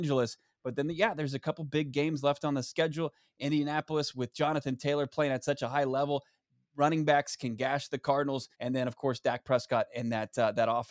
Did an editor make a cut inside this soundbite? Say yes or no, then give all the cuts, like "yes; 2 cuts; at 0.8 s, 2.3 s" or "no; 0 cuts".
yes; 1 cut; at 8.5 s